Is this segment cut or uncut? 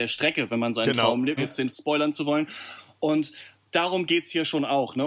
cut